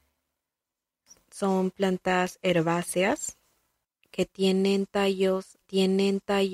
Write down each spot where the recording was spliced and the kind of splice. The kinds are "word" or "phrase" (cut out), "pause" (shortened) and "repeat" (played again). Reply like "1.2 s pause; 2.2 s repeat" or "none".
5.6 s repeat

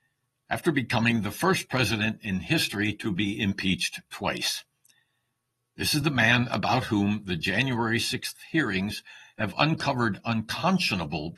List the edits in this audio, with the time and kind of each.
none

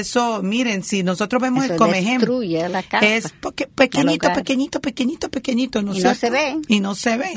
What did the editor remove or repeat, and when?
none

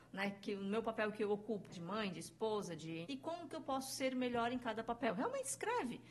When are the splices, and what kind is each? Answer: 1.7 s word; 3.0 s word

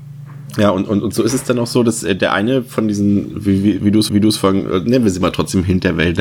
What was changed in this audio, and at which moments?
4.1 s repeat

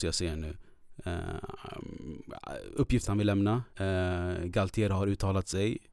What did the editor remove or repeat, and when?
3.0 s word; 3.7 s pause

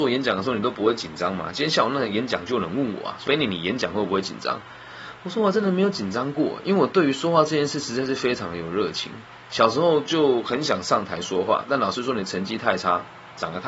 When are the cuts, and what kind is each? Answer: 3.3 s word

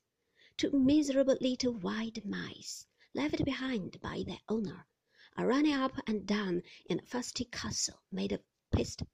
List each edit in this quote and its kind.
none

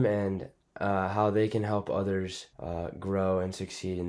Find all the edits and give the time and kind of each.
2.5 s pause

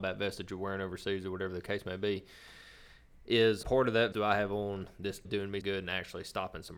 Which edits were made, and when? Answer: 3.6 s word; 4.1 s word; 5.2 s word; 5.6 s word

